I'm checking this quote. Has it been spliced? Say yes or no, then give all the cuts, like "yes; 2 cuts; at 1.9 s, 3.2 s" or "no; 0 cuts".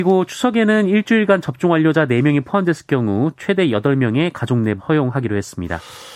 yes; 1 cut; at 4.8 s